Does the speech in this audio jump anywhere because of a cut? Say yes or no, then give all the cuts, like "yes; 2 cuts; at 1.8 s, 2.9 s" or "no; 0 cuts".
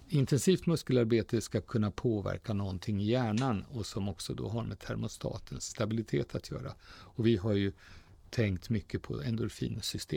no; 0 cuts